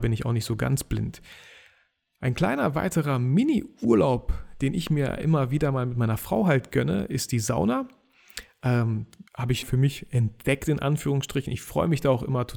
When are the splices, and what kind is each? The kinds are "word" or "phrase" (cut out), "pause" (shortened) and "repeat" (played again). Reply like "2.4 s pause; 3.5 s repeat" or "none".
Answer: 9.3 s pause; 9.6 s word

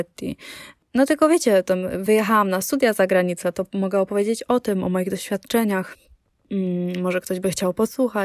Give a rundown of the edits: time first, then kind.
none

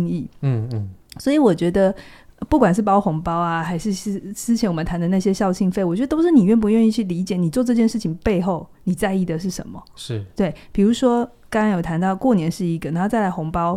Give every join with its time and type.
8.7 s pause

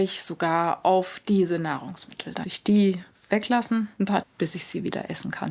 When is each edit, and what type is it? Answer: 2.4 s word; 4.2 s word

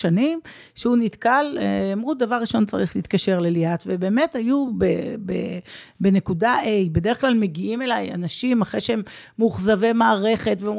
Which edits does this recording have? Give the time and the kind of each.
none

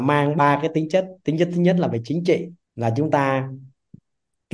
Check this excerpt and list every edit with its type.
2.6 s pause

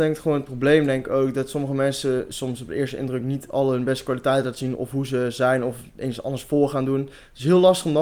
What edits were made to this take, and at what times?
none

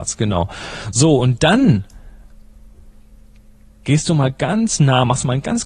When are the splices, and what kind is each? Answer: none

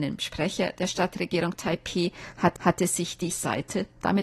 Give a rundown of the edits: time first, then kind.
2.6 s repeat; 3.3 s word

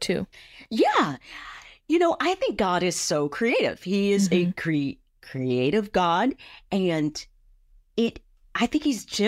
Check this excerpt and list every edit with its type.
none

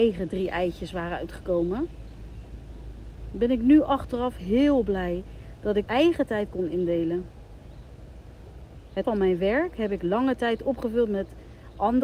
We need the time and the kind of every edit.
5.9 s word; 9.0 s word

